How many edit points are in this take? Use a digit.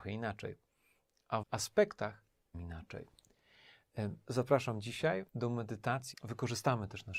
4